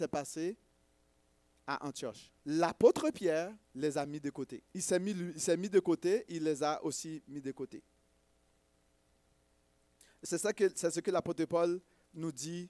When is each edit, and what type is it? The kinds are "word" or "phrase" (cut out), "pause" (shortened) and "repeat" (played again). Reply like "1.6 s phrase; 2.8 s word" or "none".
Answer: 2.4 s pause; 3.6 s pause; 4.7 s pause